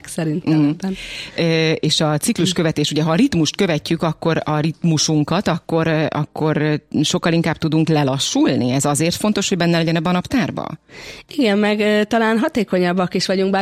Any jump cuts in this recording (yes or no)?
no